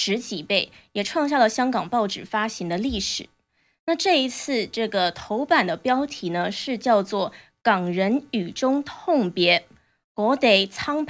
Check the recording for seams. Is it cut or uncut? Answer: uncut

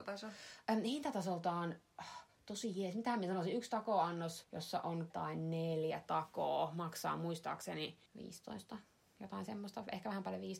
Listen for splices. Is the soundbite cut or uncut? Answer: cut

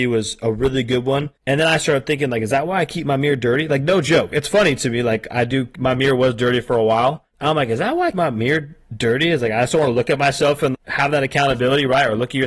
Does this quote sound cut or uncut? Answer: cut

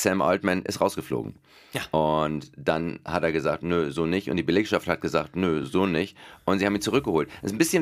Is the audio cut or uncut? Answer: uncut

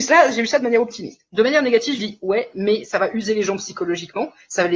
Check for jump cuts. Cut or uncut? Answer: cut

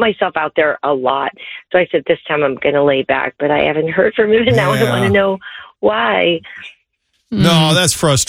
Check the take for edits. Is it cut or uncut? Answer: uncut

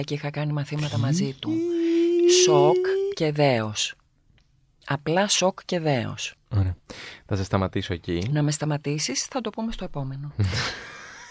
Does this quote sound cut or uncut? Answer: cut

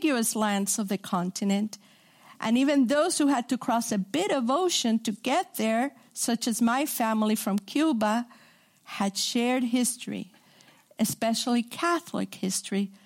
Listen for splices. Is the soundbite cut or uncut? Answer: uncut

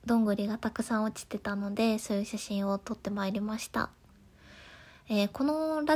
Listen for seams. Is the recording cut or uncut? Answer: uncut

